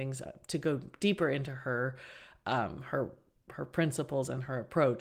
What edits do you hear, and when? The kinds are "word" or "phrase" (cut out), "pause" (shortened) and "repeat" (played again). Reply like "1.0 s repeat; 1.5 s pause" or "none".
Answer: none